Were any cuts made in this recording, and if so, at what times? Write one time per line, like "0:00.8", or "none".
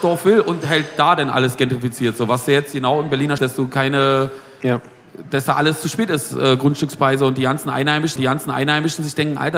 0:03.4
0:08.2